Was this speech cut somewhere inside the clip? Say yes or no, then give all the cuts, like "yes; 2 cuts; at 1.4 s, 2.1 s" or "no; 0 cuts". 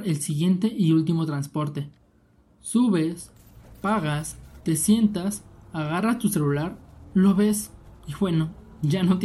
no; 0 cuts